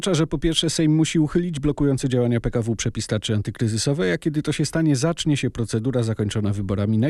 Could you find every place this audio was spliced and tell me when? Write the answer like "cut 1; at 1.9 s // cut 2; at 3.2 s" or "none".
none